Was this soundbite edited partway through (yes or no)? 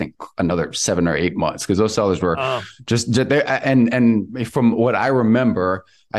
no